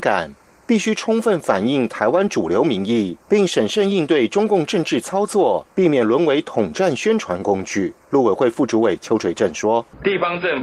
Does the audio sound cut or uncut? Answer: cut